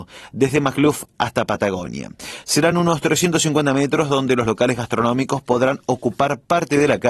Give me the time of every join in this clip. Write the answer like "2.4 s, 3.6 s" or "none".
none